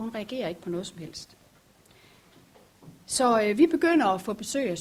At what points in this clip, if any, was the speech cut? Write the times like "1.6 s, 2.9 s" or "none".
none